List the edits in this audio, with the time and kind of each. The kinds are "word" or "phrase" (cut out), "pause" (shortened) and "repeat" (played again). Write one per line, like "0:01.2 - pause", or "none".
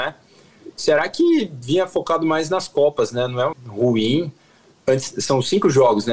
0:03.5 - word

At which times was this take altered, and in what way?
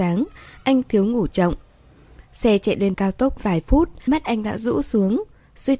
0:01.3 - word
0:02.9 - word
0:03.4 - word
0:04.1 - word

